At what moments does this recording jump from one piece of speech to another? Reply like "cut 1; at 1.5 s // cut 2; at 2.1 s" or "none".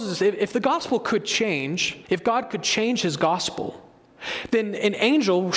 cut 1; at 2.0 s